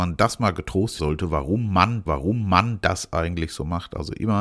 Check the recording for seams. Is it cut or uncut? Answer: cut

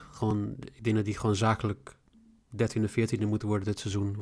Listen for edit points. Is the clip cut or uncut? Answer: uncut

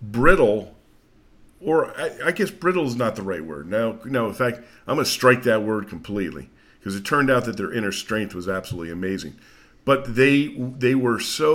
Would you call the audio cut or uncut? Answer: uncut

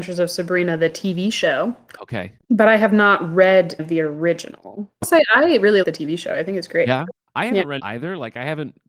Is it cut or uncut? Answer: cut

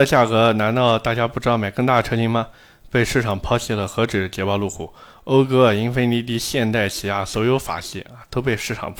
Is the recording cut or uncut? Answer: uncut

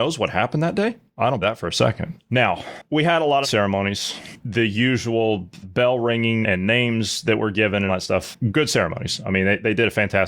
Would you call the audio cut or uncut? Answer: cut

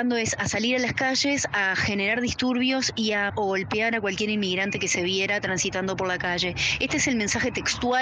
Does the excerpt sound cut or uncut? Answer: cut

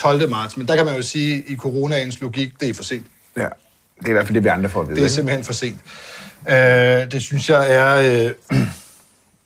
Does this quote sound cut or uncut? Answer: uncut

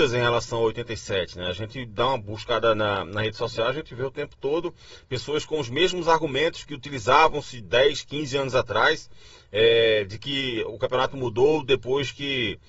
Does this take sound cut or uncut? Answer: uncut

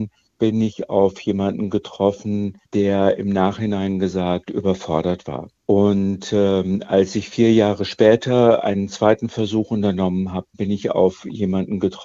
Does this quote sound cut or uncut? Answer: cut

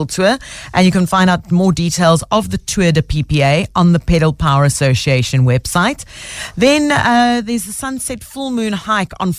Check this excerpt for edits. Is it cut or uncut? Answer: uncut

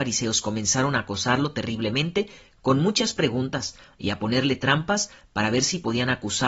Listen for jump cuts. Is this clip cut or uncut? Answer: uncut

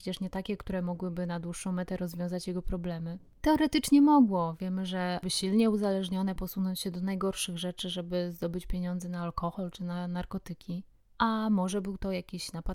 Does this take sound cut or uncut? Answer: cut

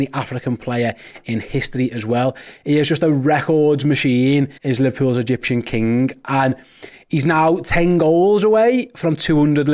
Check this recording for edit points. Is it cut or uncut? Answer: cut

